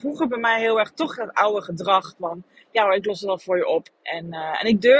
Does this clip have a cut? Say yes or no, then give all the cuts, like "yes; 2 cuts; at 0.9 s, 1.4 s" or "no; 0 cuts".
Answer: yes; 1 cut; at 3.9 s